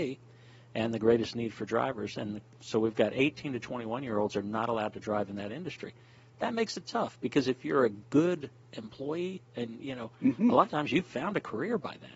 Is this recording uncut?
yes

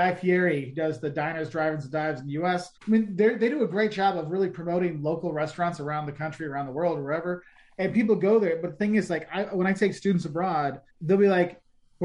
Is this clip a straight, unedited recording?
no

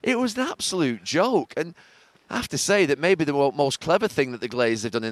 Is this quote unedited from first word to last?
yes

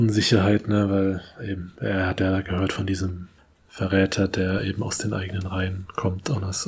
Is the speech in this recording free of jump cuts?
yes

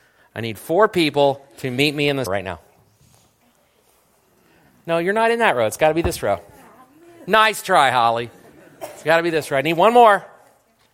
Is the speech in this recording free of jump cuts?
no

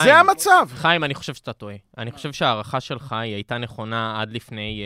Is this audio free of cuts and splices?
yes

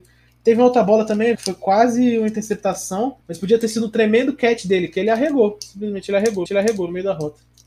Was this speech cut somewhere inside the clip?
yes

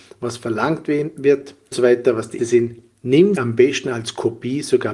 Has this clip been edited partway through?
yes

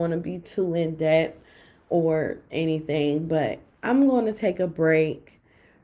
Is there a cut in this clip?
no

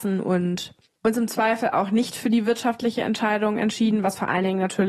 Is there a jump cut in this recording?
no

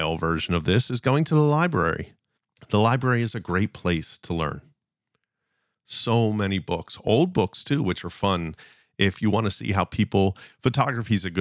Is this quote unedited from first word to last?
yes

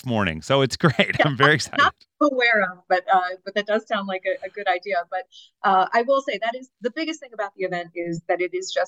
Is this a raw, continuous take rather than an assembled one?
yes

